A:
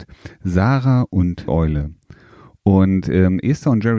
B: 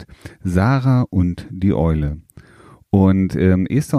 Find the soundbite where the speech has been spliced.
A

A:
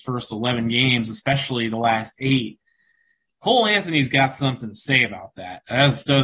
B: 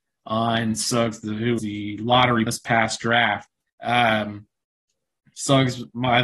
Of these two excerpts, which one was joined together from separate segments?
B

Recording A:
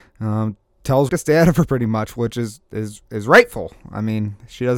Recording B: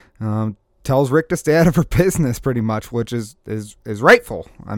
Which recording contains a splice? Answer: A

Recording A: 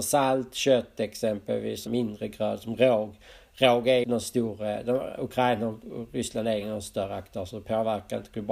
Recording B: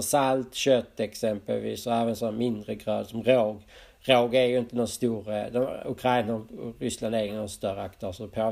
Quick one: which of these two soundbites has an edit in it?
A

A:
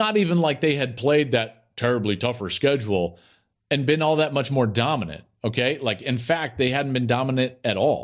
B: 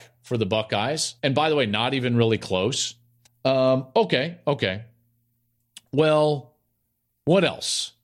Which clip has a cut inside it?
B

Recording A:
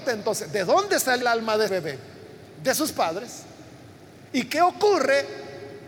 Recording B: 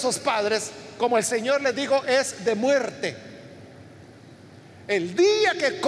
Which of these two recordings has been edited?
A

